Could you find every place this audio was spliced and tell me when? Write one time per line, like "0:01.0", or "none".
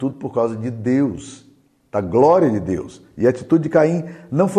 none

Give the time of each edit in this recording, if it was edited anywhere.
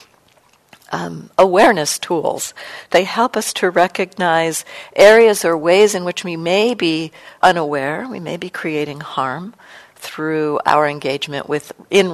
0:07.4

